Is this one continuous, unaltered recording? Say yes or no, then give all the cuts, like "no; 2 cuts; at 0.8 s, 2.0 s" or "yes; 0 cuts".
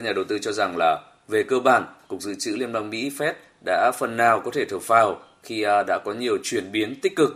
yes; 0 cuts